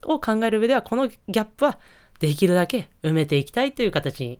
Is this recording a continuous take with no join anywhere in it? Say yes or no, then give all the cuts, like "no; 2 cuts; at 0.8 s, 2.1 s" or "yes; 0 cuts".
yes; 0 cuts